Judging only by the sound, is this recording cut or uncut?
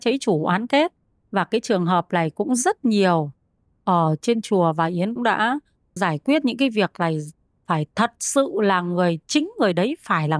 cut